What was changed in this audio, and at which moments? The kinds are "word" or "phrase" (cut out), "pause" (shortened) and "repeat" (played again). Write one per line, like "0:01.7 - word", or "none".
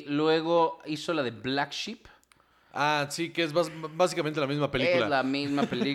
none